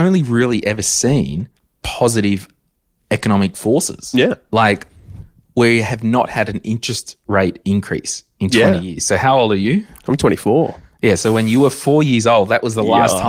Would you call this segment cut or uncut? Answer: uncut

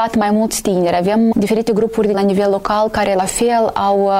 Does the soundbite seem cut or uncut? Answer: cut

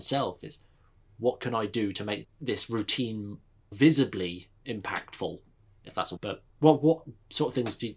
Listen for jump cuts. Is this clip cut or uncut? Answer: cut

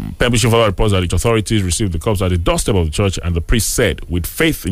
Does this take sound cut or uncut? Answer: cut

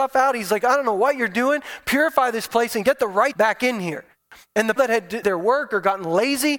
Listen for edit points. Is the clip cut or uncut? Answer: cut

